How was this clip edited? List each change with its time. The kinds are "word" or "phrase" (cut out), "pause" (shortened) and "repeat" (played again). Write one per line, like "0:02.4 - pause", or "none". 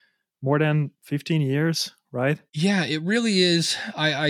0:00.9 - pause
0:02.5 - pause